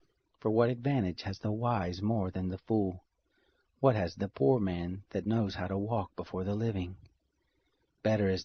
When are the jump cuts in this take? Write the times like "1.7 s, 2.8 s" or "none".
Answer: none